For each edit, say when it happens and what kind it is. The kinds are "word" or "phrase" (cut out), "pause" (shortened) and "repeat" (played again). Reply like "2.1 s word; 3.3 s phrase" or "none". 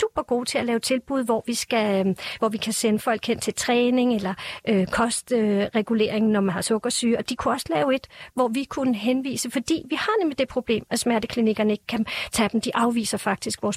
none